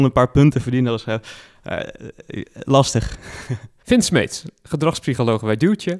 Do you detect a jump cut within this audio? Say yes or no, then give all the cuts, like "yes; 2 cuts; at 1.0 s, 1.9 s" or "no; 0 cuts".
no; 0 cuts